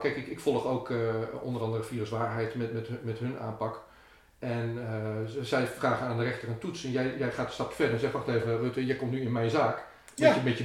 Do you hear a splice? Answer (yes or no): no